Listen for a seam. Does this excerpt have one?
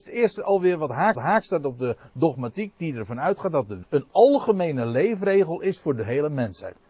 yes; 2 cuts; at 1.1 s, 3.8 s

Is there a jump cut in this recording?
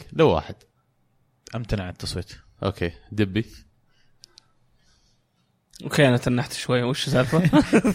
no; 0 cuts

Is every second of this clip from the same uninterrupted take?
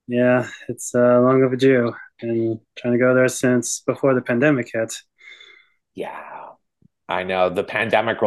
yes; 0 cuts

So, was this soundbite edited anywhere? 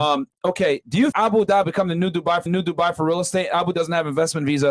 yes; 4 cuts; at 1.1 s, 1.6 s, 2.5 s, 3.7 s

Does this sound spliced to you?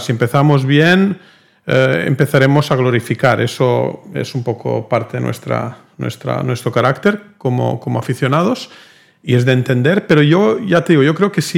no; 0 cuts

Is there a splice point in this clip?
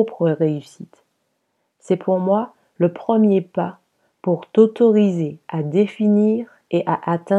no; 0 cuts

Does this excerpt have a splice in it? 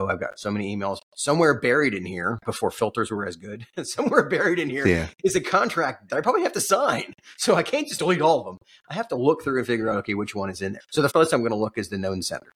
yes; 4 cuts; at 2.4 s, 6.1 s, 8.0 s, 11.1 s

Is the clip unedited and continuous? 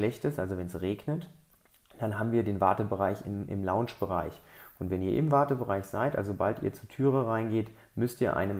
yes; 0 cuts

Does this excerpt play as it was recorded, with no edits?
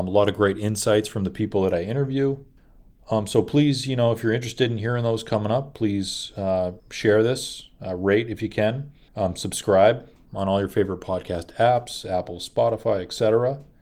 no; 3 cuts; at 2.6 s, 6.8 s, 9.1 s

